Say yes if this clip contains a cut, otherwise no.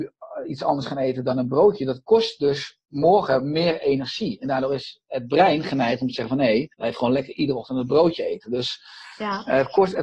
yes